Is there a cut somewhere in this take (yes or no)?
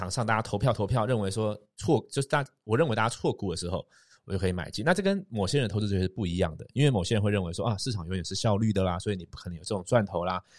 no